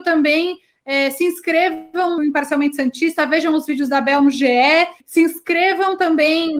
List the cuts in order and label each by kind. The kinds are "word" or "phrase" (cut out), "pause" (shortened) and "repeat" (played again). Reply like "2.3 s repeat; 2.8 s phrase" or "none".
2.2 s word; 5.0 s pause